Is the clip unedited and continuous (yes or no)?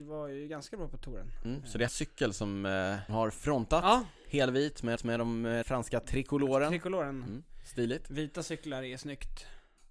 no